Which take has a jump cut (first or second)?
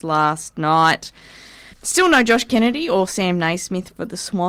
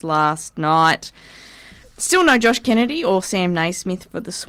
first